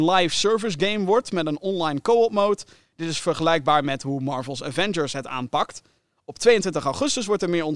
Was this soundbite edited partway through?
no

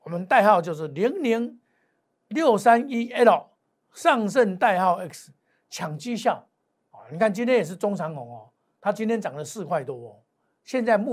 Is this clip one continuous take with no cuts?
yes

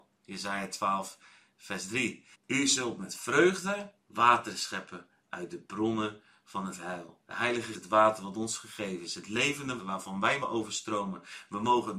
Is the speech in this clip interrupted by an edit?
yes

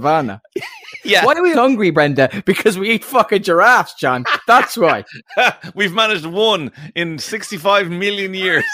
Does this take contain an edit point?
yes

